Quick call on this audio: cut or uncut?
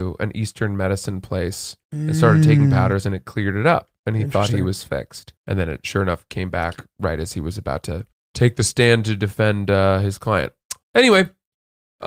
cut